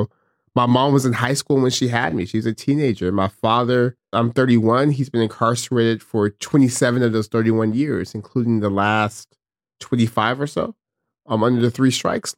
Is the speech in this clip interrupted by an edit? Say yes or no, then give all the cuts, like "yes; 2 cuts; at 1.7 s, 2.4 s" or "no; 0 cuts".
no; 0 cuts